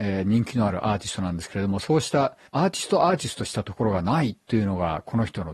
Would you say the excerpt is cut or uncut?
cut